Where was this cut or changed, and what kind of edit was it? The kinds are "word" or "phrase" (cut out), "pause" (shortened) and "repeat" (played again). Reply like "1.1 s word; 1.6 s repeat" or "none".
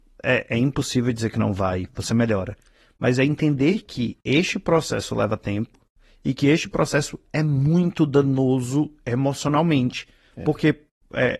none